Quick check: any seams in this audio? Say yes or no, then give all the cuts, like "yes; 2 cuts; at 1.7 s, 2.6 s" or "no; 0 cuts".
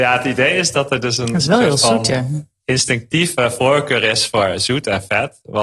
no; 0 cuts